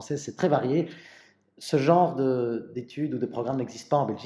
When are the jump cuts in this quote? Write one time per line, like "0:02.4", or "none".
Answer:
none

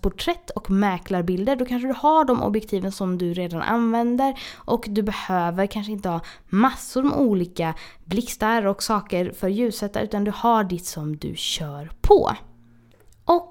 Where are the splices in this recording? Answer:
none

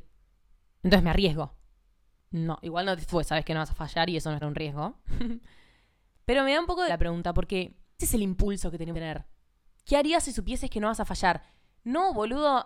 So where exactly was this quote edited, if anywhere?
0:03.1
0:04.4
0:06.9
0:08.0
0:08.9

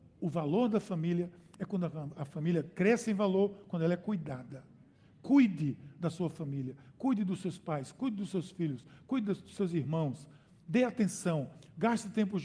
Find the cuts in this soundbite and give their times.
none

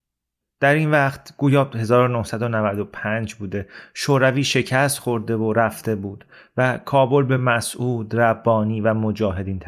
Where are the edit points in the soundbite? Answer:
none

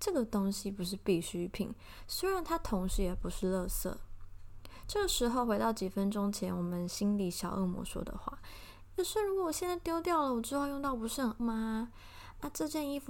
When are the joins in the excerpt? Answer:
0:11.4

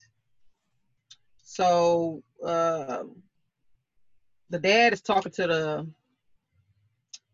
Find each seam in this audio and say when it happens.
none

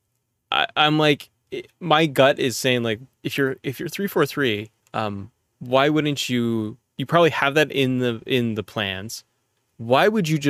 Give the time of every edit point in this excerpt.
0:03.1
0:04.8
0:06.8

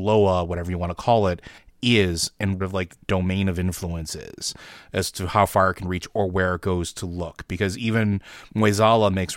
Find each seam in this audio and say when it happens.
0:02.6

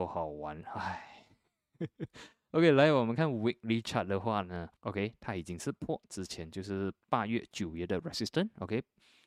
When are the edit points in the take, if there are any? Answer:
0:04.8
0:07.0

